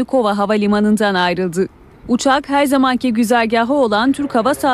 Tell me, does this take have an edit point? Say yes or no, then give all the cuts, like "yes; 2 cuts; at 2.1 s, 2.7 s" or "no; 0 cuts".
no; 0 cuts